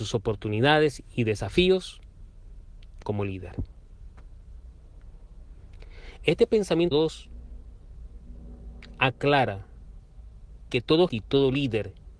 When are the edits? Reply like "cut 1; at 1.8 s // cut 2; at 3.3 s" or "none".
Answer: cut 1; at 3.0 s // cut 2; at 6.9 s // cut 3; at 10.7 s // cut 4; at 11.1 s